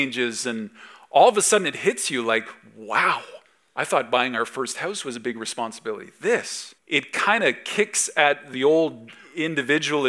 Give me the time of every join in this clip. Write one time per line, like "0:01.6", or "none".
0:03.5
0:06.8